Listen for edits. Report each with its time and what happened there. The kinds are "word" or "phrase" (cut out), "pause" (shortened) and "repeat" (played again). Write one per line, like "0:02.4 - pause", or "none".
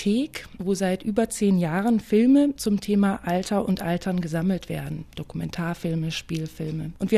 none